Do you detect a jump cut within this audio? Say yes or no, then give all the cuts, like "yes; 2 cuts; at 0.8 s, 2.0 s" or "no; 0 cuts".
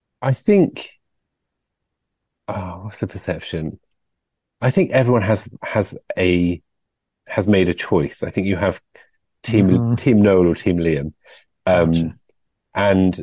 no; 0 cuts